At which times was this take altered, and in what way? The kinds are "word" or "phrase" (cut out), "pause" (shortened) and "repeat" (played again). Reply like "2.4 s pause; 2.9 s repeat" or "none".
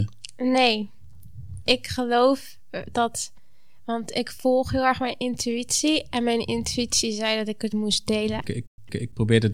none